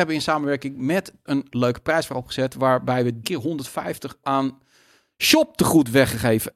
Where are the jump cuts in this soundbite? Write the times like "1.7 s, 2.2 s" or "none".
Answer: 1.3 s, 3.2 s, 4.2 s

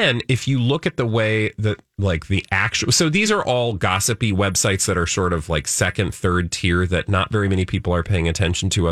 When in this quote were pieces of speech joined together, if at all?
none

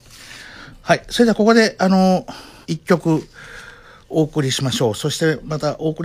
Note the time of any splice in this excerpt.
2.6 s

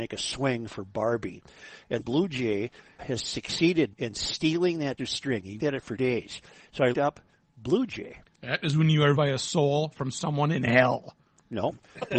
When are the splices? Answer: 2.0 s, 3.0 s, 3.9 s, 5.0 s, 5.6 s, 6.0 s, 6.9 s, 9.1 s

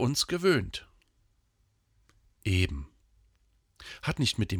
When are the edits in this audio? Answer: none

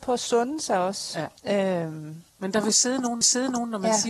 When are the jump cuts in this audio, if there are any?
1.4 s, 2.3 s, 3.2 s

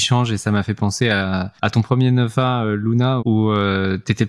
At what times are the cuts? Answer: 1.6 s, 3.2 s

